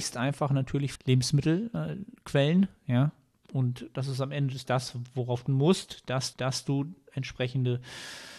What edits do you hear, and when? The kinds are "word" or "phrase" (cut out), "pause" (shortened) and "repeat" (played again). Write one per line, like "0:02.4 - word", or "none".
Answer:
0:01.0 - word
0:04.7 - word
0:05.5 - word
0:06.3 - repeat